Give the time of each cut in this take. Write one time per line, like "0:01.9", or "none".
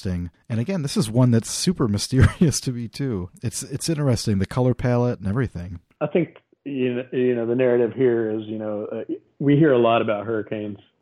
none